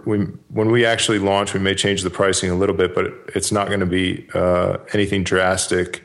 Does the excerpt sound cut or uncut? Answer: uncut